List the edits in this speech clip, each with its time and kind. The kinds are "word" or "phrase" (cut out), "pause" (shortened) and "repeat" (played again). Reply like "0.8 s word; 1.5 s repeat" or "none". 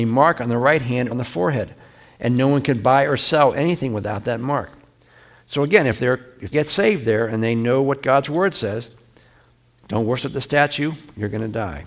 1.1 s word; 6.5 s word

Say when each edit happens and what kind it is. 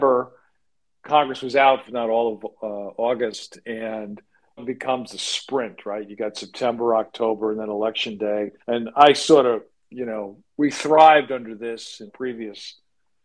1.8 s phrase; 4.6 s word; 8.6 s pause; 9.7 s pause; 12.1 s word

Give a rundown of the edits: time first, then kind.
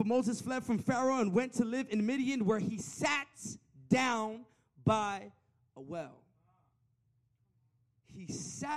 none

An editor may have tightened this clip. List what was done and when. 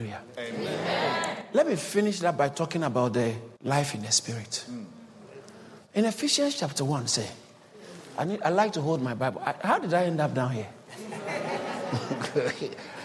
3.6 s pause

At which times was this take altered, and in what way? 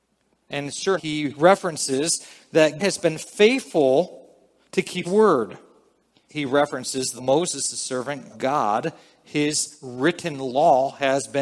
1.0 s word; 2.8 s word; 5.0 s word; 6.3 s word; 7.2 s word; 8.3 s word

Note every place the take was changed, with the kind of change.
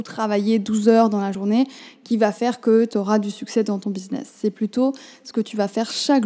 none

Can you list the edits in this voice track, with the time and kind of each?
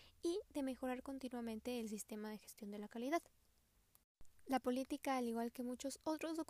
none

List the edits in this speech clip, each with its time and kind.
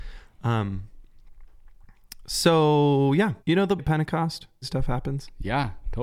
3.4 s pause; 3.8 s word; 4.6 s phrase

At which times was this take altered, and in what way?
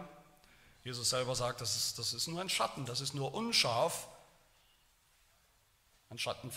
none

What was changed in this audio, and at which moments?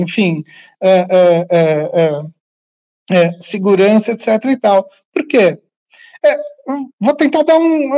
none

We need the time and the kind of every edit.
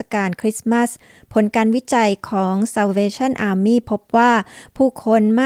none

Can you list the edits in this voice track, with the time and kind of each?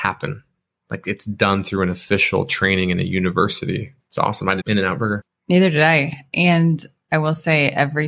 4.6 s phrase

